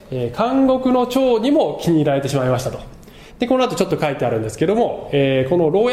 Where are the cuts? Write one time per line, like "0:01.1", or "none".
0:03.3